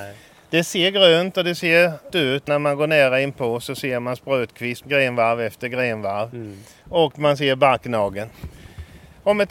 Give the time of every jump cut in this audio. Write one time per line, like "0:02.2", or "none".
0:02.1
0:02.5
0:04.8